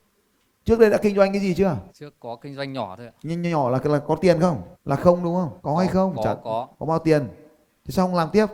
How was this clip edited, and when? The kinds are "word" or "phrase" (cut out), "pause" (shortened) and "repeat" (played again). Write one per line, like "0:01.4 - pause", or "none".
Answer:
0:01.9 - pause
0:04.7 - pause
0:05.6 - pause
0:06.7 - pause

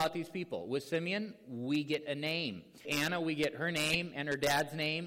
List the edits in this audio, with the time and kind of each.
0:02.8 - word

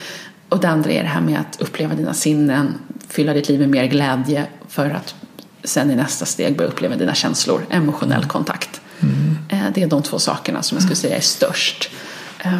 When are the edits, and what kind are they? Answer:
none

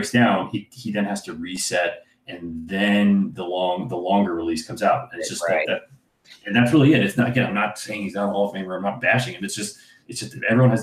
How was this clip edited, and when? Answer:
none

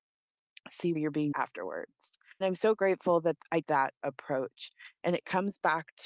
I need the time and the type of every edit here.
0:01.0 - word
0:01.3 - word
0:02.4 - word
0:03.6 - word

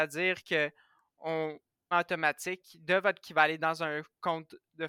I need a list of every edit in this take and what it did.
0:01.9 - phrase
0:03.2 - phrase

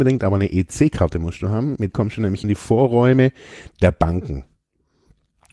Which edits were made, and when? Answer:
0:01.9 - word
0:02.4 - word

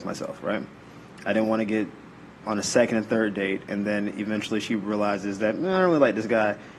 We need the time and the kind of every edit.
none

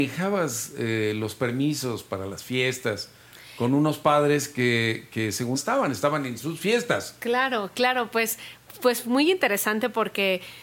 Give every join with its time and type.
0:05.5 - phrase

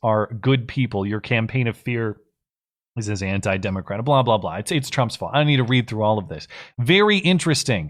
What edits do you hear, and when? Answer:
none

